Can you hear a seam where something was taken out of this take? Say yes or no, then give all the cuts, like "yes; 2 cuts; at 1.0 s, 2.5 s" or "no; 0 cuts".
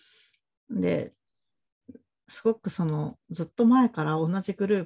no; 0 cuts